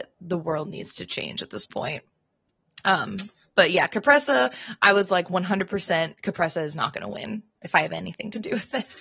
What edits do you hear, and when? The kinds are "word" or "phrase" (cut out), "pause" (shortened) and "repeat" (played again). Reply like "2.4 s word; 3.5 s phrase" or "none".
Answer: none